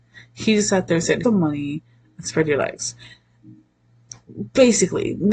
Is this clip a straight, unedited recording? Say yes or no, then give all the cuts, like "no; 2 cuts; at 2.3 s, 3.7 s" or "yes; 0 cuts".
no; 1 cut; at 1.2 s